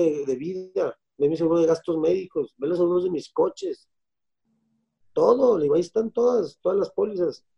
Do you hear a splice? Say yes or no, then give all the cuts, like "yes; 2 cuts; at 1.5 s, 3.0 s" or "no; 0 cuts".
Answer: no; 0 cuts